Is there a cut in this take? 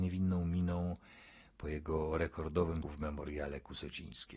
yes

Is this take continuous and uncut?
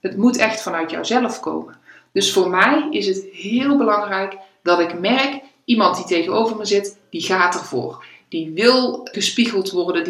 no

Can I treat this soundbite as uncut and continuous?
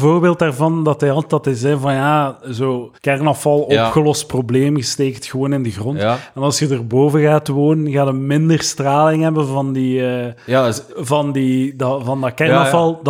no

